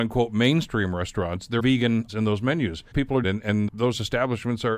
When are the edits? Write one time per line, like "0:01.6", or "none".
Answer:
0:01.6
0:02.1
0:02.9
0:03.2
0:03.7